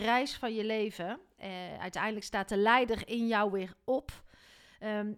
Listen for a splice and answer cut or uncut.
uncut